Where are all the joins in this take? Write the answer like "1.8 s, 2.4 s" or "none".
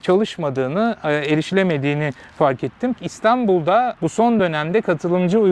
none